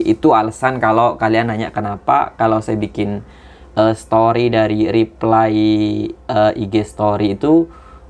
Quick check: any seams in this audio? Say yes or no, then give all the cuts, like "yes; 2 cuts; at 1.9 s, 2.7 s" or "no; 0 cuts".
no; 0 cuts